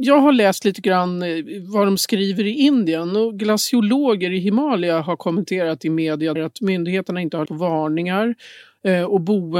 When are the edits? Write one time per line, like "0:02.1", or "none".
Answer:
0:06.4
0:07.5